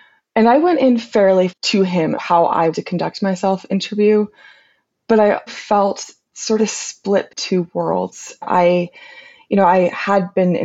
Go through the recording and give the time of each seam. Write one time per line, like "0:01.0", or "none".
0:01.5
0:02.1
0:02.7
0:03.7
0:05.5
0:06.6
0:07.3
0:08.4